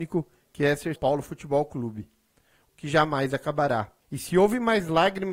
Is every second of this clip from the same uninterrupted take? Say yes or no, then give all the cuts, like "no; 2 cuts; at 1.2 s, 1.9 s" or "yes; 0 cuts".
no; 3 cuts; at 1.0 s, 2.7 s, 4.0 s